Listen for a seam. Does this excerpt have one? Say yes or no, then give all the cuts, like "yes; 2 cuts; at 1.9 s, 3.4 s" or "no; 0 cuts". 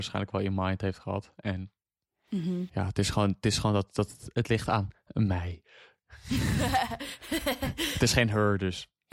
no; 0 cuts